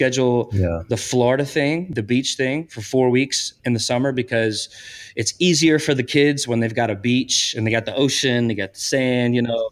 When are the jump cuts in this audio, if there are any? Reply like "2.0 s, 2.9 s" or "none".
3.6 s